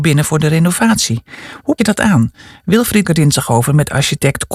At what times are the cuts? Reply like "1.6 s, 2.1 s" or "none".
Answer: 1.8 s, 3.0 s